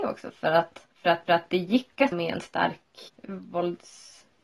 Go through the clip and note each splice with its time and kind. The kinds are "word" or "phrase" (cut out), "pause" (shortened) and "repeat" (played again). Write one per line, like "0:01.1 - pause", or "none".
0:00.9 - pause
0:01.3 - repeat
0:02.1 - word
0:03.1 - word

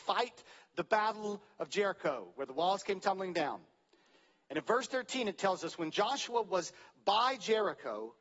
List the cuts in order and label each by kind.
none

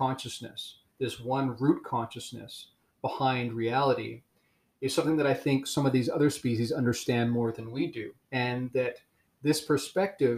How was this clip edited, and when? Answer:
0:08.2 - pause

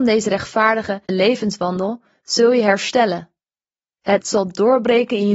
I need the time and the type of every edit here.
0:01.1 - word
0:04.2 - word

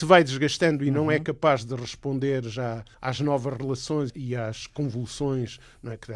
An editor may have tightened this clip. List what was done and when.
0:02.9 - pause

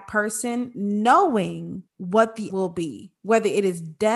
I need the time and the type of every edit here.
0:01.9 - pause
0:02.5 - word

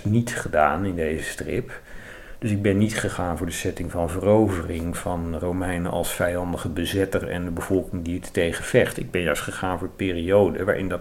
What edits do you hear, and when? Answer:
none

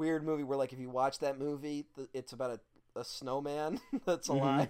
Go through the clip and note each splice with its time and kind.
none

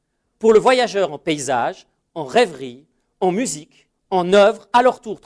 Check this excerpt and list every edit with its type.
0:03.9 - pause

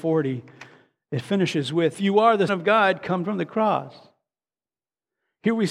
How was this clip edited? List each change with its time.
0:01.9 - word
0:02.5 - word
0:03.2 - word

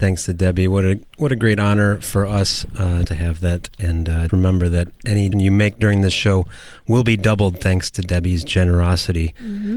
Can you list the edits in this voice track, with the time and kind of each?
0:03.0 - word
0:04.3 - word
0:05.3 - word

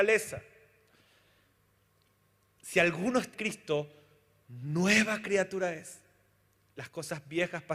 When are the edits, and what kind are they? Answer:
0:03.3 - word

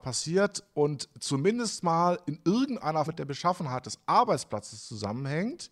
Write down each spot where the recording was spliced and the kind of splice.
0:03.1 - word

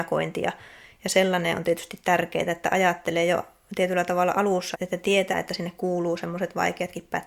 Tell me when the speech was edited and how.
0:04.7 - word
0:05.3 - phrase

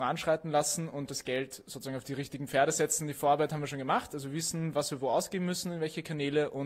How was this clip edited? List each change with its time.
0:01.1 - word

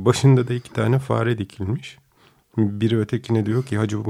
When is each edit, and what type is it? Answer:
none

